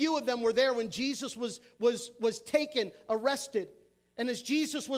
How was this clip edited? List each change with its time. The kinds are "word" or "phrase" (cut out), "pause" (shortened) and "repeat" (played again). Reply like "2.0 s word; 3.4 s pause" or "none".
none

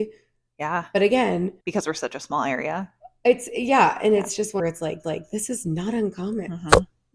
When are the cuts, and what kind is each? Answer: 1.6 s pause; 4.6 s phrase; 5.0 s repeat

